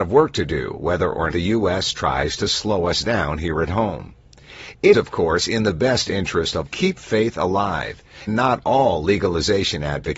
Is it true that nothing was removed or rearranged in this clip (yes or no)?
no